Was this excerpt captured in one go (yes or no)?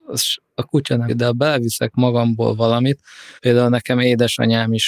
no